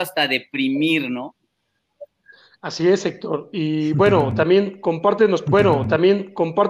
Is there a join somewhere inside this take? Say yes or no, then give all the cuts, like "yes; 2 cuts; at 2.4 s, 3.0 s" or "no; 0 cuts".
yes; 1 cut; at 5.5 s